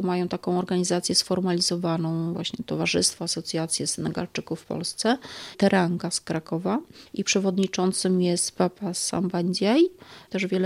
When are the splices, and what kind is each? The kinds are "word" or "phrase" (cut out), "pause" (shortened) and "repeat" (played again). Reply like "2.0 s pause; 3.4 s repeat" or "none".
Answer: none